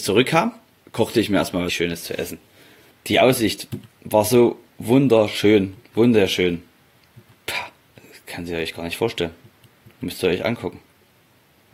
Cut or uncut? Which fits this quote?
cut